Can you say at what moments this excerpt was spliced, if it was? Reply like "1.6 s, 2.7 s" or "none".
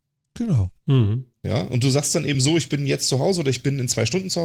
none